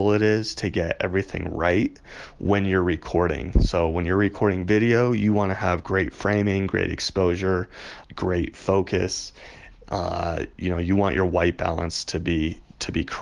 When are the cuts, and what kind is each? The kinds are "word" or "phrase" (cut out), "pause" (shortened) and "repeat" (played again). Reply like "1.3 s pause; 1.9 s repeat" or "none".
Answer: 8.0 s word